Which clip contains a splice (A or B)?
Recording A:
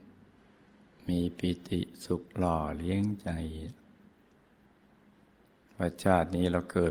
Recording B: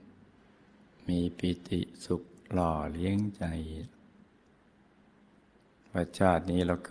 A